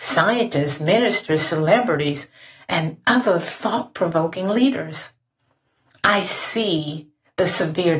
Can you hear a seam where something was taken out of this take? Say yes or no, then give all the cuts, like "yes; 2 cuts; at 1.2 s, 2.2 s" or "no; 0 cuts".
no; 0 cuts